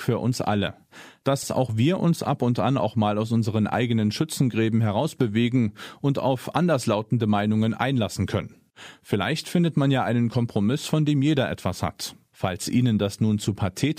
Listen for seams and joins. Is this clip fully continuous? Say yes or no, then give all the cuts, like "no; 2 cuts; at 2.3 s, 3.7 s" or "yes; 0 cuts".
yes; 0 cuts